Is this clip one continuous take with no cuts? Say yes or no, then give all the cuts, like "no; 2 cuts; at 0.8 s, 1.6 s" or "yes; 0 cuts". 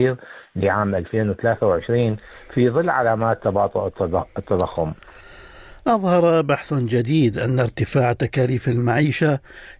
yes; 0 cuts